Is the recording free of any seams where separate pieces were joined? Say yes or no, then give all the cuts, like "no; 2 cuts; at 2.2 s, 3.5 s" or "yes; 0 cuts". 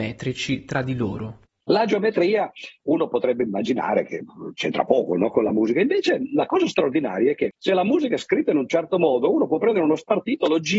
yes; 0 cuts